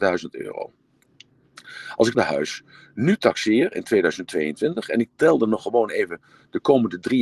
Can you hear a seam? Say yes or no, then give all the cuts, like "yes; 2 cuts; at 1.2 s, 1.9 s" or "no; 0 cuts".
yes; 1 cut; at 2.1 s